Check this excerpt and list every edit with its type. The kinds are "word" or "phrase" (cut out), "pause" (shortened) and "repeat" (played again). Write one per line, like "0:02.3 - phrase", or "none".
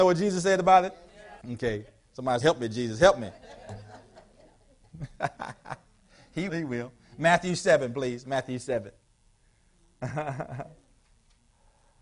0:01.4 - pause
0:02.4 - word
0:06.5 - word